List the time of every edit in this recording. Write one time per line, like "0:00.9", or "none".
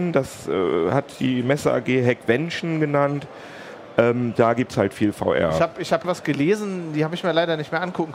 0:06.0